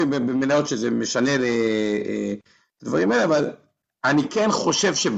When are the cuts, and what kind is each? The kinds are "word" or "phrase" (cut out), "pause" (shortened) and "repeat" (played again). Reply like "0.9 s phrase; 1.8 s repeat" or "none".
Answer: none